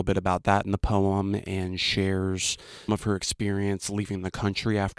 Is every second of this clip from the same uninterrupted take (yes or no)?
no